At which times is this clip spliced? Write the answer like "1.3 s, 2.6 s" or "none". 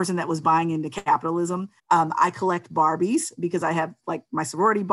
1.8 s